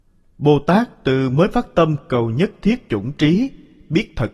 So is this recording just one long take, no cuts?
no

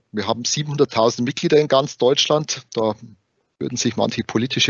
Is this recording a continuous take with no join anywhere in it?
yes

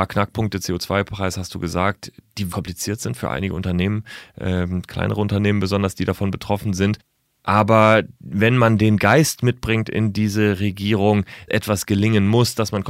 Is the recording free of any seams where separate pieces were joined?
no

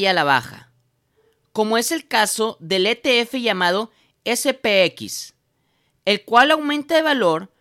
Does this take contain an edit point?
no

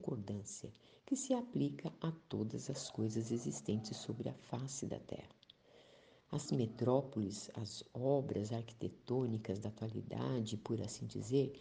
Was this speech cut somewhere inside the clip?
yes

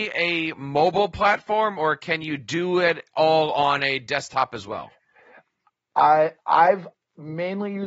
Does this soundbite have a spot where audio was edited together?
yes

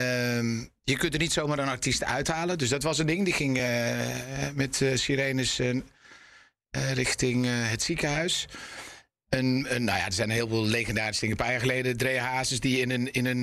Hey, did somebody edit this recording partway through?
no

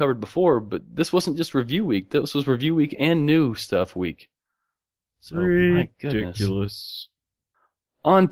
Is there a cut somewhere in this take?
no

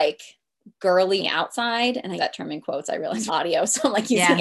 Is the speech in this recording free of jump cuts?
no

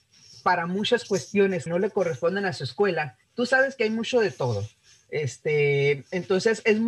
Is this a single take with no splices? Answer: no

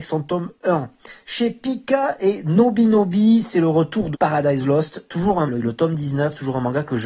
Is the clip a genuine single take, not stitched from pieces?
no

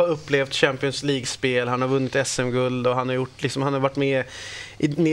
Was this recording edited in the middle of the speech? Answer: no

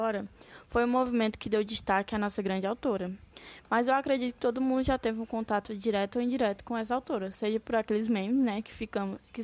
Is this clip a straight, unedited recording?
yes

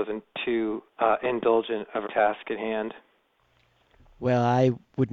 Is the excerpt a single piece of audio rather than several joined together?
no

